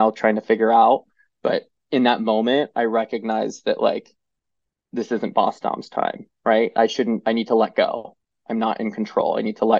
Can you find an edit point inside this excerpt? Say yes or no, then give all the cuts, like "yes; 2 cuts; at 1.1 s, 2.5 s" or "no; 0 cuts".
no; 0 cuts